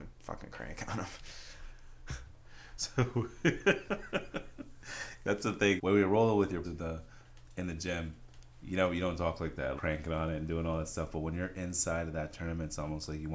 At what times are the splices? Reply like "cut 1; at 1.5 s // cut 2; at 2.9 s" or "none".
cut 1; at 5.8 s // cut 2; at 6.6 s // cut 3; at 9.8 s